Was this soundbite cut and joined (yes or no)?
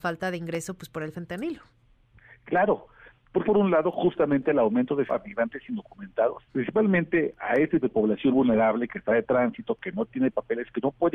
yes